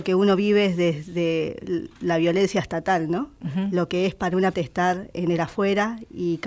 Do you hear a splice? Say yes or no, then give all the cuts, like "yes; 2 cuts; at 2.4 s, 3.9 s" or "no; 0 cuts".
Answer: yes; 1 cut; at 4.5 s